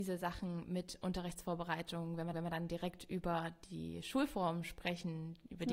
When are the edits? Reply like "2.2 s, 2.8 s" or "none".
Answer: 2.3 s